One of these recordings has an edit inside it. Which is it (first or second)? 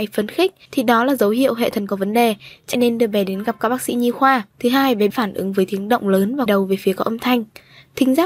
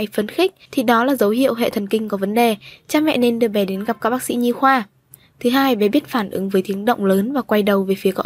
first